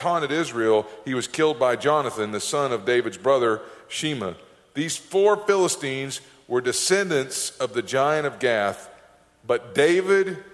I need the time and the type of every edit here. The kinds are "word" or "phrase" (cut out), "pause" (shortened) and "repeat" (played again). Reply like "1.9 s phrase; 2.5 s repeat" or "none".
none

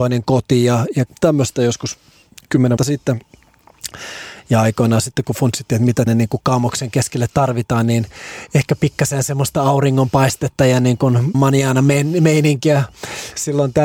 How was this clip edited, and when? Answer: 1.1 s word; 2.8 s word; 6.1 s word; 11.3 s word

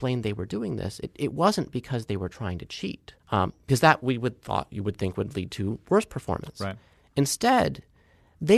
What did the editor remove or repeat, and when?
3.2 s pause

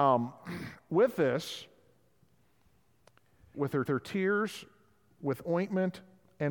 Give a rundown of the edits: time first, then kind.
3.5 s phrase; 3.9 s repeat

